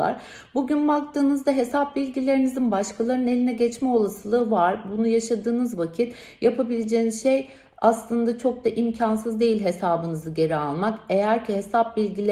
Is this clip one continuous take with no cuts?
yes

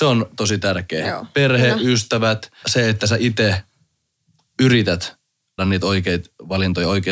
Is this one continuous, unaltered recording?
no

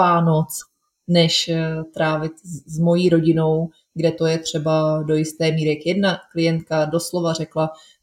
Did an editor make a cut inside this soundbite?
no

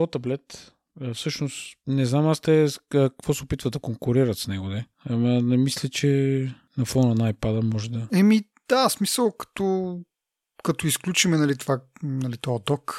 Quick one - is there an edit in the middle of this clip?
no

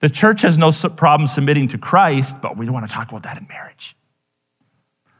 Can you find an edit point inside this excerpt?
no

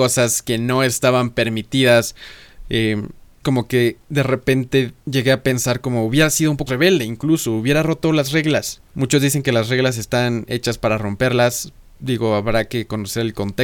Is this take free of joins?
no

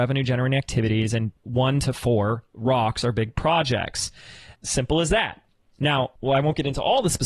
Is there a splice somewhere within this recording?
yes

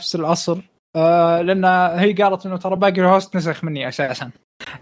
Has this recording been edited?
no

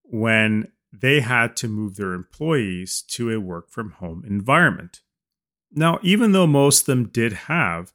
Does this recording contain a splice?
no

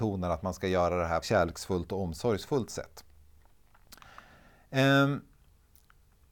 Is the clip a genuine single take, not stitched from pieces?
no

